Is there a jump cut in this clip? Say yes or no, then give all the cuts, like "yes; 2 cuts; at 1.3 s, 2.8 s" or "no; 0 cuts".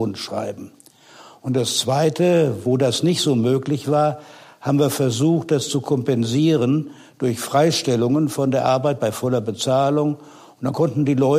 no; 0 cuts